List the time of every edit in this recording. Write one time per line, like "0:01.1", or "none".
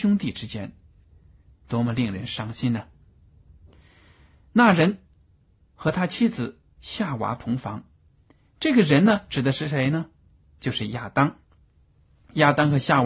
none